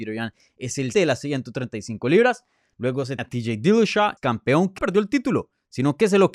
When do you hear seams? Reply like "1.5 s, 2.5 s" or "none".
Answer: 0.9 s, 3.2 s, 4.2 s, 4.8 s